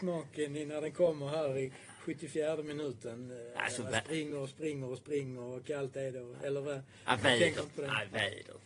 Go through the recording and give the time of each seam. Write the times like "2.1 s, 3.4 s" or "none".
none